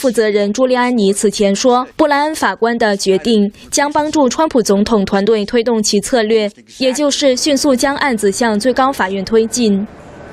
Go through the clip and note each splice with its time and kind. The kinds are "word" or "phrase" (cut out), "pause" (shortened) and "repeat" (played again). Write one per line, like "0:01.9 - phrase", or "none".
0:01.9 - pause